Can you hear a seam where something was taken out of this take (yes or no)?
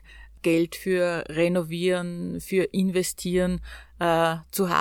no